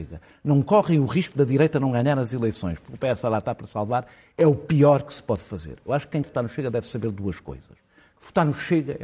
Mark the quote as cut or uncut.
cut